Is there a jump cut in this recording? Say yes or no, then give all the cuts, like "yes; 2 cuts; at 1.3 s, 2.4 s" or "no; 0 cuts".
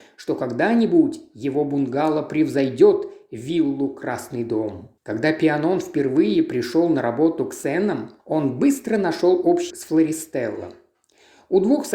yes; 3 cuts; at 5.0 s, 8.2 s, 9.7 s